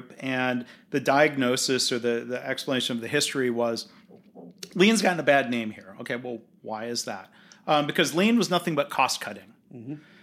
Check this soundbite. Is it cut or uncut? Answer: uncut